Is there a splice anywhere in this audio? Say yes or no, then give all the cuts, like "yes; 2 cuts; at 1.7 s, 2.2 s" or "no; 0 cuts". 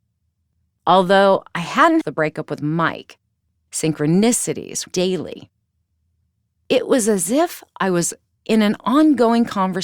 yes; 2 cuts; at 2.0 s, 4.9 s